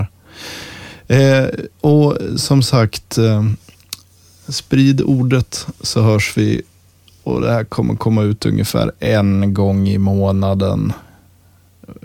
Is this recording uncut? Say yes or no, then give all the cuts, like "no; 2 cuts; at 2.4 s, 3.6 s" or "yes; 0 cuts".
yes; 0 cuts